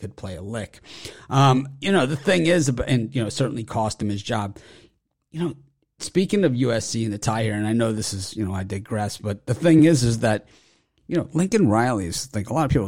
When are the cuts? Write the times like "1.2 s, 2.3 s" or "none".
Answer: none